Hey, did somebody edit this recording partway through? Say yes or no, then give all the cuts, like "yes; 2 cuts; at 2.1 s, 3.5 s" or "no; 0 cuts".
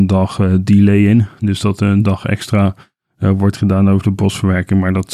no; 0 cuts